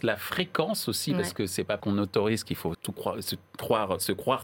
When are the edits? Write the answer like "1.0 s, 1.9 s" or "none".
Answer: 1.8 s, 2.7 s

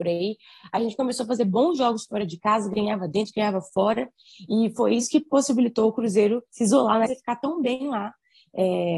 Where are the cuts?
6.5 s, 7.1 s

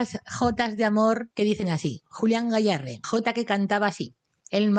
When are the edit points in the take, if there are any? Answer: 1.3 s, 3.0 s

